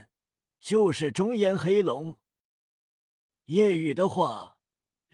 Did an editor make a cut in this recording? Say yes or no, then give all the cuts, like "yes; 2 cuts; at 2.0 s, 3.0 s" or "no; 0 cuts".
no; 0 cuts